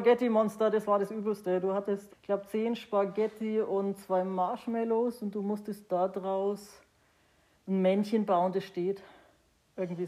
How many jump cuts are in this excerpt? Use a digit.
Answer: 1